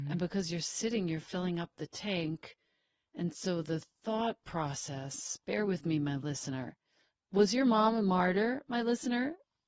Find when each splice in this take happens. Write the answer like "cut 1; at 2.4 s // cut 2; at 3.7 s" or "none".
none